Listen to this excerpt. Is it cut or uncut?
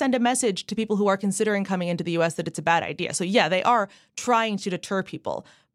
uncut